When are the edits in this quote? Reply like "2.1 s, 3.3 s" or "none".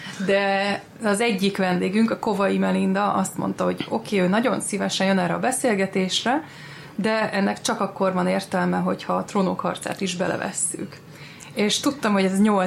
none